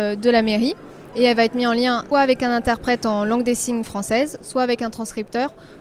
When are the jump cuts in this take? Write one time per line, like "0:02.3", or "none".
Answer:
0:02.1